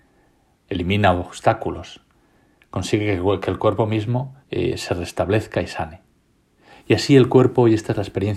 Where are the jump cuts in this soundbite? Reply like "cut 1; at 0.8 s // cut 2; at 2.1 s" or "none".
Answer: cut 1; at 4.4 s